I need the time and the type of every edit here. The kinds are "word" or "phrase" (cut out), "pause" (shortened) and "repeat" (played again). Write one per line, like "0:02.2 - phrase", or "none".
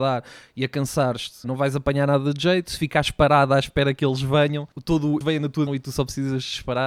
0:01.4 - word
0:04.7 - pause
0:05.2 - word
0:05.7 - word